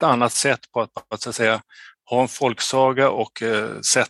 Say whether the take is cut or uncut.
uncut